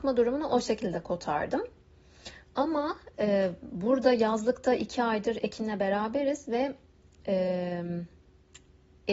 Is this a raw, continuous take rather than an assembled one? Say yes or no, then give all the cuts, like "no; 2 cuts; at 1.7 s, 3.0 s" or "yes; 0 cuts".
yes; 0 cuts